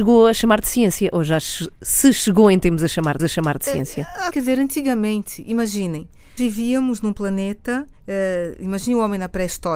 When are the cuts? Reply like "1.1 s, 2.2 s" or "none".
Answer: 3.2 s, 4.3 s, 6.4 s, 8.0 s